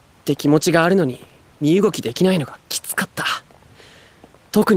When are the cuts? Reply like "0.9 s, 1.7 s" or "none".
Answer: none